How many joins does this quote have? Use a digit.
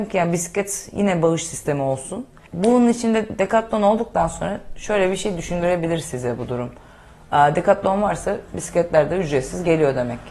0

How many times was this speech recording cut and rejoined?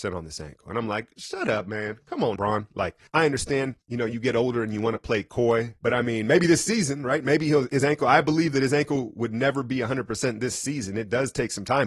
4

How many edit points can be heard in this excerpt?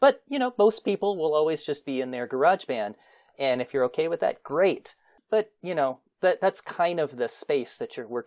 0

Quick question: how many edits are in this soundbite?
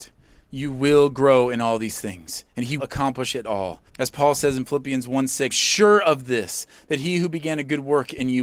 3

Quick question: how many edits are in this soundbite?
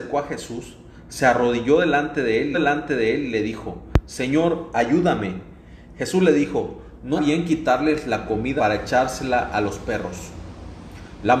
3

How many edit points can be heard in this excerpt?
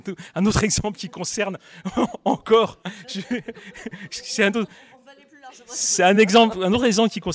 0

